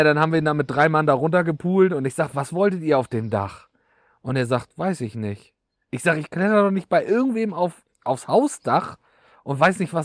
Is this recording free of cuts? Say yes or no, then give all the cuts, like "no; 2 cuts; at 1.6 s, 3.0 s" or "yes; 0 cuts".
yes; 0 cuts